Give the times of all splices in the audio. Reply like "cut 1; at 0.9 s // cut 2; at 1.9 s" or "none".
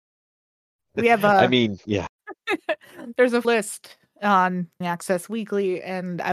cut 1; at 3.4 s // cut 2; at 4.8 s

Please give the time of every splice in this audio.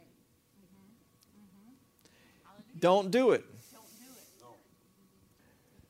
none

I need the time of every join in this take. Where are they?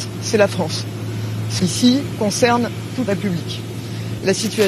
cut 1; at 1.6 s // cut 2; at 3.1 s

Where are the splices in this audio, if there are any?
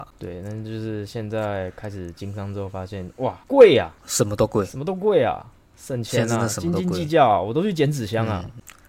none

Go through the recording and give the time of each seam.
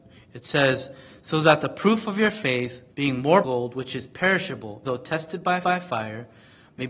cut 1; at 2.9 s // cut 2; at 3.4 s // cut 3; at 4.8 s // cut 4; at 5.6 s

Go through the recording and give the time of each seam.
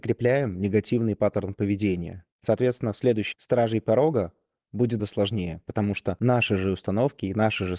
cut 1; at 2.3 s // cut 2; at 3.3 s // cut 3; at 5.0 s

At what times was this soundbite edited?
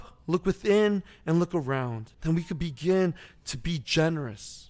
cut 1; at 2.1 s

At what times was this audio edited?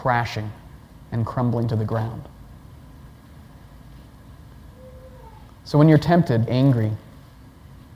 cut 1; at 6.5 s

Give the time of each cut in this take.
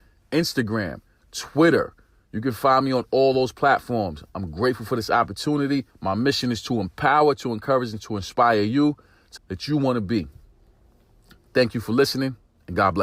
cut 1; at 5.9 s // cut 2; at 9.4 s

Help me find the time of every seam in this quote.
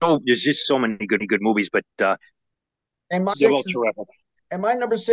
cut 1; at 1.2 s // cut 2; at 3.3 s

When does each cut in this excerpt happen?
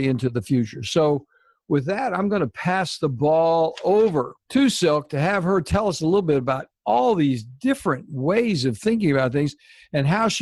cut 1; at 4.4 s

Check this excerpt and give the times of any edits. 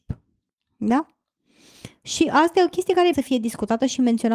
cut 1; at 3.1 s

